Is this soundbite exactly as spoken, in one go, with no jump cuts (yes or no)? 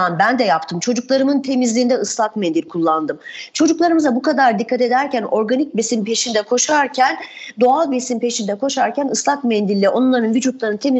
yes